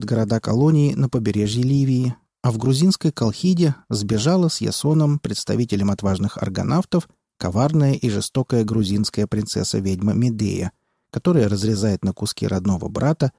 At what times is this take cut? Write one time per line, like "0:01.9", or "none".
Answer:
none